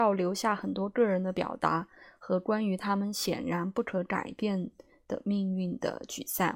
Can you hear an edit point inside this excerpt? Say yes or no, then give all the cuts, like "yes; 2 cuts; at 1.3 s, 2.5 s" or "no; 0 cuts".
no; 0 cuts